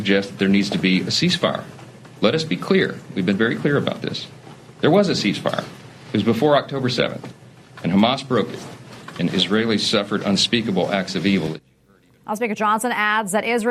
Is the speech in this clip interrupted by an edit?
no; 0 cuts

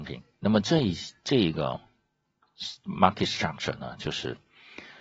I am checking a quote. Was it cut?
no; 0 cuts

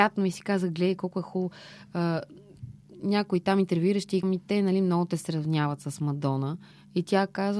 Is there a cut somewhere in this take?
yes; 2 cuts; at 4.2 s, 6.7 s

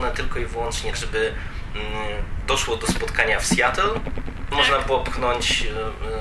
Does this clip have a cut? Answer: yes; 2 cuts; at 0.9 s, 4.5 s

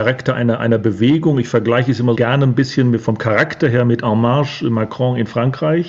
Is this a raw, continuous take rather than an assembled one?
no; 1 cut; at 2.1 s

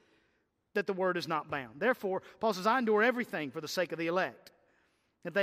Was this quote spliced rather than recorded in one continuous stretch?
no; 0 cuts

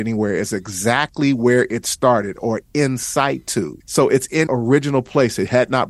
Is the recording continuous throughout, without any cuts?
no; 2 cuts; at 3.8 s, 4.5 s

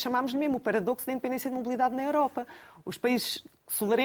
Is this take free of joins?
yes; 0 cuts

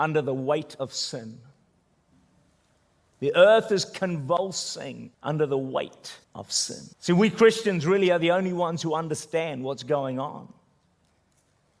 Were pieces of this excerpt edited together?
yes; 4 cuts; at 2.1 s, 5.1 s, 6.2 s, 6.9 s

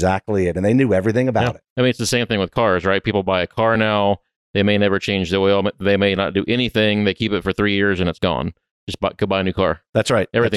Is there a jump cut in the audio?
no; 0 cuts

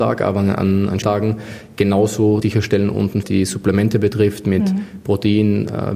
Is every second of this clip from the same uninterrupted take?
no; 3 cuts; at 1.0 s, 2.4 s, 3.2 s

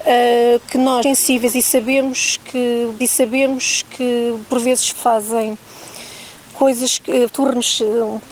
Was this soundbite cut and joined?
yes; 4 cuts; at 1.0 s, 3.0 s, 4.9 s, 7.3 s

